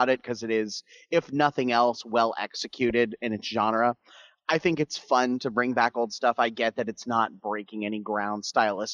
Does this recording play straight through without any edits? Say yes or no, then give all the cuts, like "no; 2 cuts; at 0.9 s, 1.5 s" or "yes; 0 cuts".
yes; 0 cuts